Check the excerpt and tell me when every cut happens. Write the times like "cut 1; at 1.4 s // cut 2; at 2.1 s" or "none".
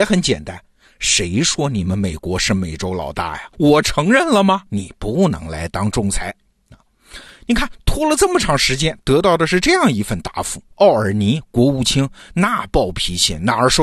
cut 1; at 3.5 s // cut 2; at 4.7 s // cut 3; at 10.7 s